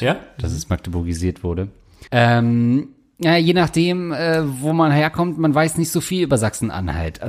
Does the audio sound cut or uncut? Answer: cut